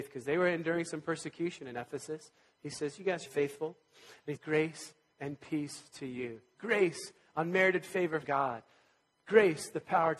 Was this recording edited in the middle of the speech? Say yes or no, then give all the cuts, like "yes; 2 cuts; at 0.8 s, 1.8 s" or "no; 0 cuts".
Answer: yes; 3 cuts; at 3.3 s, 4.4 s, 8.2 s